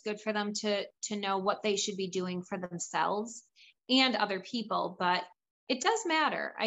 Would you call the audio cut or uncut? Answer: uncut